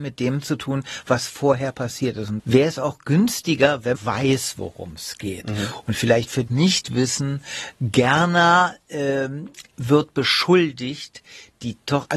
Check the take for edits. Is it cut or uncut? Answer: cut